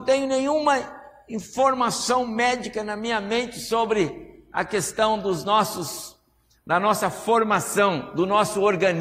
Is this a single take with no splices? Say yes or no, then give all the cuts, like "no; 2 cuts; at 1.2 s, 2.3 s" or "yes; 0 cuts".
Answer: yes; 0 cuts